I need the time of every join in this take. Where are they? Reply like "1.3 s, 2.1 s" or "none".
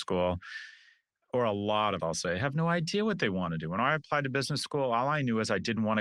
2.0 s

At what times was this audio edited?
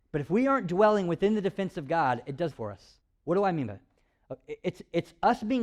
2.5 s, 3.0 s

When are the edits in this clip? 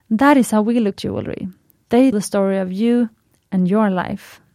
1.0 s, 2.1 s

